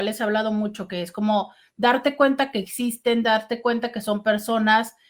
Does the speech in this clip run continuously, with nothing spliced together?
yes; 0 cuts

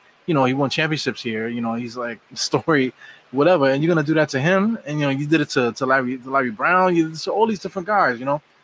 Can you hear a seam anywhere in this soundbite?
yes; 1 cut; at 2.2 s

